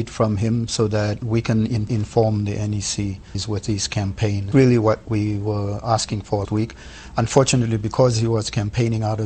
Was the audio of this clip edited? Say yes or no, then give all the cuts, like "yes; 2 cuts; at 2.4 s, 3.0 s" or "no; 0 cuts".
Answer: yes; 4 cuts; at 1.9 s, 3.3 s, 4.5 s, 6.4 s